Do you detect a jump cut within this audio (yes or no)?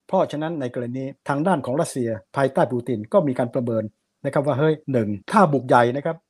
yes